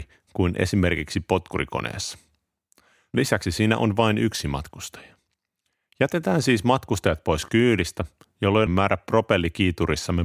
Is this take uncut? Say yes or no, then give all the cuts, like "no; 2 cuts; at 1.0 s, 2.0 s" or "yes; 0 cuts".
no; 1 cut; at 8.7 s